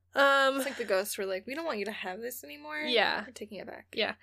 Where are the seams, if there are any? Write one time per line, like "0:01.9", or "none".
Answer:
none